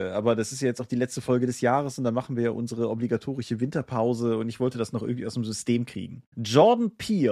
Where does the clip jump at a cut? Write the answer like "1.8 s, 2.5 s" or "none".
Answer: none